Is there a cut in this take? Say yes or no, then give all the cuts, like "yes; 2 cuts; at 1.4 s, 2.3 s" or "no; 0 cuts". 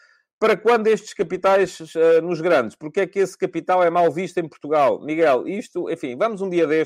no; 0 cuts